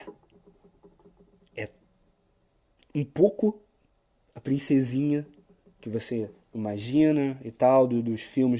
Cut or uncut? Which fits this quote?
uncut